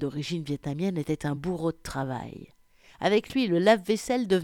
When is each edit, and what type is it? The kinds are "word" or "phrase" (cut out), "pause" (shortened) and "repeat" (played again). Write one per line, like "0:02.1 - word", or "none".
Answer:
none